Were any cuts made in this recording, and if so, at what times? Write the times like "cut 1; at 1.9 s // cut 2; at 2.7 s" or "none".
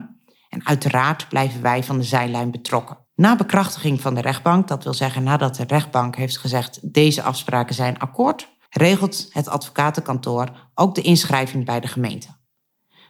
cut 1; at 3.1 s // cut 2; at 8.7 s